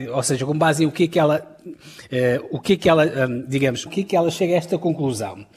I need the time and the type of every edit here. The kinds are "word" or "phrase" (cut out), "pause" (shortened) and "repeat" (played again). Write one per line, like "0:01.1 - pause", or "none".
0:03.9 - phrase